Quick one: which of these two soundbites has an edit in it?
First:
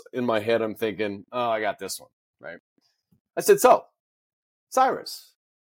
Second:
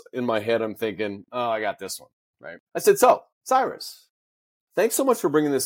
second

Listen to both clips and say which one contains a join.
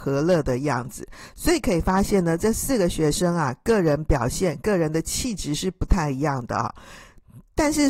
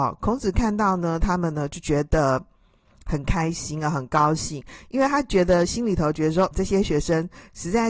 second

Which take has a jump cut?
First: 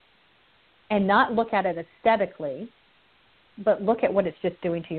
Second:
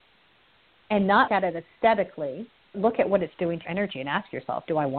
second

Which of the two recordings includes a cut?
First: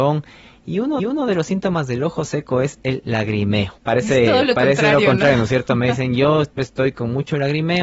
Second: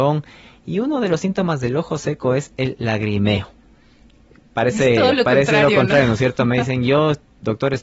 first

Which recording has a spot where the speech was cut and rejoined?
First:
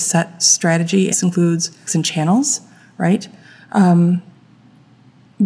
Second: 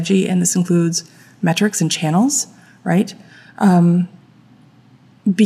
first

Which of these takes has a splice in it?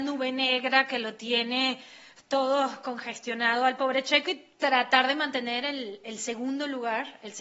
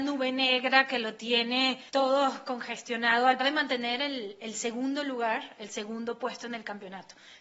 second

